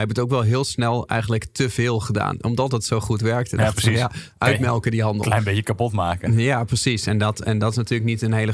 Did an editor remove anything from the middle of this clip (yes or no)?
no